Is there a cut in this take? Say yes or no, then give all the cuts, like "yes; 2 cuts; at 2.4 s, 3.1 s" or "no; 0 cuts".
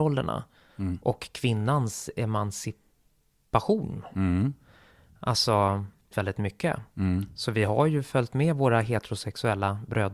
yes; 1 cut; at 6.1 s